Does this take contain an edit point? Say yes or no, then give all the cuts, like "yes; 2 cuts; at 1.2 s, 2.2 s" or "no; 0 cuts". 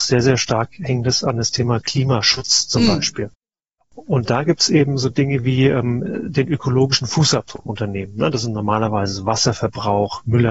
yes; 1 cut; at 7.7 s